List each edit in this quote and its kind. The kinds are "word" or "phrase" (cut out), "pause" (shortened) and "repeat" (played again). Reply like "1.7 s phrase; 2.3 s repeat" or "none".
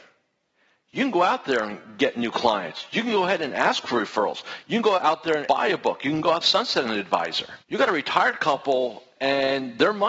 5.0 s word; 5.5 s word; 6.4 s phrase; 7.6 s pause